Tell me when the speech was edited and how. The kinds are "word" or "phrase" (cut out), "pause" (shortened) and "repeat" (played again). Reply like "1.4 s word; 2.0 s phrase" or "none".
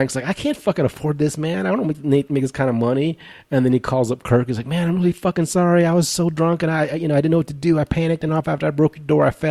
8.3 s phrase